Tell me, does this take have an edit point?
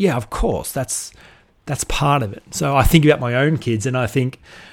no; 0 cuts

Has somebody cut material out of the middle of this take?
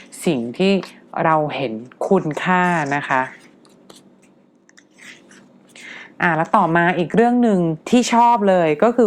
yes; 1 cut; at 7.8 s

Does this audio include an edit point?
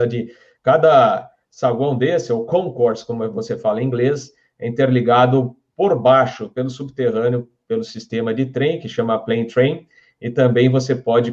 no; 0 cuts

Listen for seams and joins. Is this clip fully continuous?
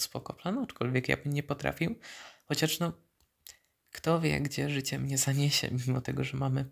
yes; 0 cuts

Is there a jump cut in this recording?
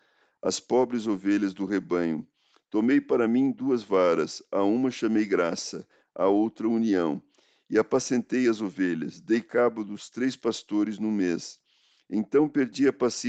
no; 0 cuts

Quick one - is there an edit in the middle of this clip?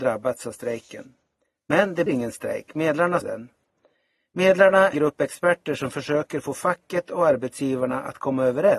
yes; 3 cuts; at 2.1 s, 3.2 s, 4.9 s

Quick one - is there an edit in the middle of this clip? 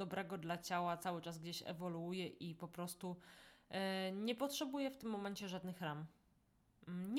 no; 0 cuts

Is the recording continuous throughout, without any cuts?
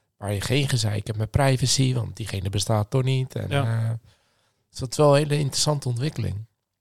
yes; 0 cuts

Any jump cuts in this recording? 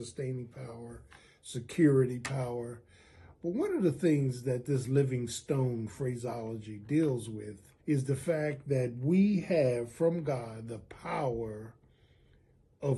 yes; 1 cut; at 7.8 s

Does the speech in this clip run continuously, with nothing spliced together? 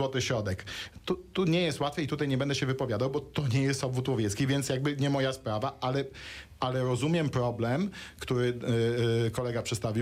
yes; 0 cuts

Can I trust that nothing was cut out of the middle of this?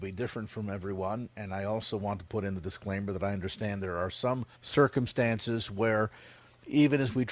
no; 1 cut; at 4.5 s

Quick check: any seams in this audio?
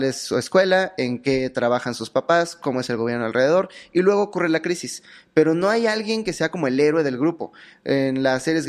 no; 0 cuts

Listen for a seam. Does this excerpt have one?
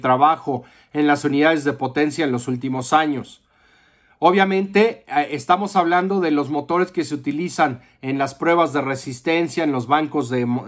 no; 0 cuts

